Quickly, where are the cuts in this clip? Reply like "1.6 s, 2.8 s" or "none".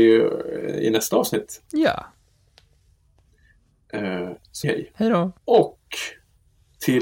4.6 s, 5.4 s